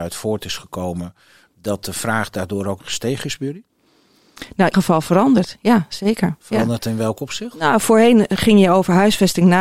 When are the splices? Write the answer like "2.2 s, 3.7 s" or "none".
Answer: 2.8 s, 4.7 s